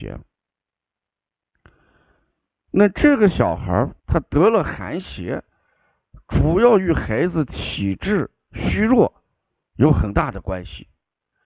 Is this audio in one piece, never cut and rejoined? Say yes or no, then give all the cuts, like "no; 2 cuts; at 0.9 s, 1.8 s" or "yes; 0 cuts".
no; 1 cut; at 4.0 s